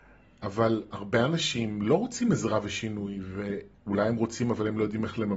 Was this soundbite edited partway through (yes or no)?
yes